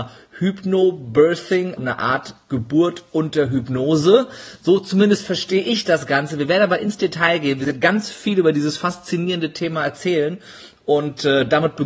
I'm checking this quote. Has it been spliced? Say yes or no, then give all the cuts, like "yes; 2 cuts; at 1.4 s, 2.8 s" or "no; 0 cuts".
yes; 1 cut; at 1.8 s